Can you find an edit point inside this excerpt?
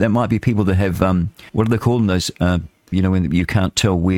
yes; 2 cuts; at 1.5 s, 2.9 s

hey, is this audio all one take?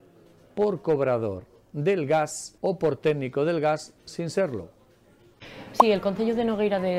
no; 2 cuts; at 2.6 s, 4.0 s

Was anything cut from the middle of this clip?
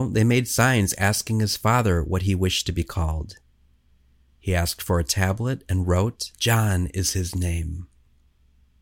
yes; 1 cut; at 6.3 s

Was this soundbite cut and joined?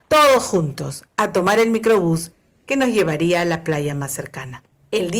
no; 0 cuts

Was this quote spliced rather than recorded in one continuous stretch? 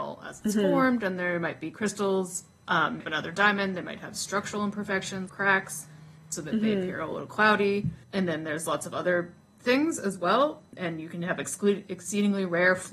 yes; 2 cuts; at 3.0 s, 5.3 s

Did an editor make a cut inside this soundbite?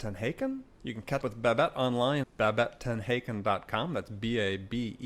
yes; 2 cuts; at 1.2 s, 2.2 s

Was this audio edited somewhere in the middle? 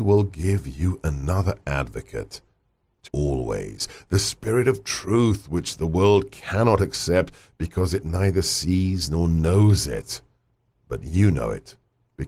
yes; 1 cut; at 3.1 s

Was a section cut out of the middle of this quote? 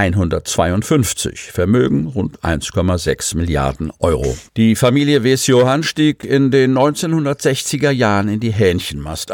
yes; 1 cut; at 4.5 s

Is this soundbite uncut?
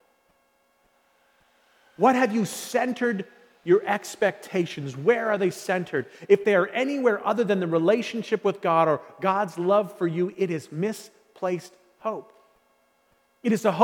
yes; 0 cuts

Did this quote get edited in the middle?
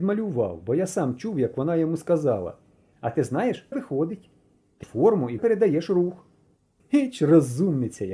yes; 3 cuts; at 3.7 s, 4.8 s, 5.4 s

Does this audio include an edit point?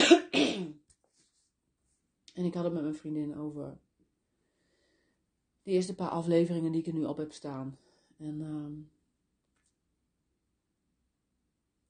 no; 0 cuts

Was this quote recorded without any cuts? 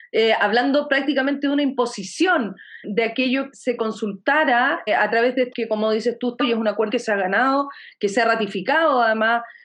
no; 6 cuts; at 2.8 s, 3.5 s, 4.9 s, 5.5 s, 6.4 s, 6.9 s

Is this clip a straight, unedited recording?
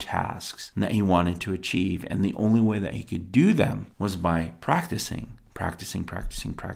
yes; 0 cuts

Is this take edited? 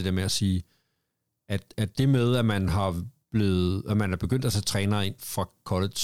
no; 0 cuts

